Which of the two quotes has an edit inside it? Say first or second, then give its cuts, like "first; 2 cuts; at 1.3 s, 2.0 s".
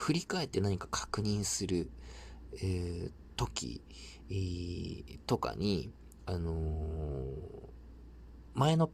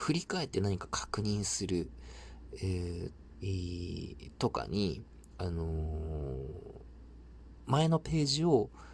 second; 1 cut; at 3.3 s